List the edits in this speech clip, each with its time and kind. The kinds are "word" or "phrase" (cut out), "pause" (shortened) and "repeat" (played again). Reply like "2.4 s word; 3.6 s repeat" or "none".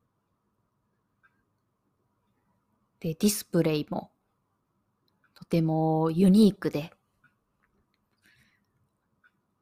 none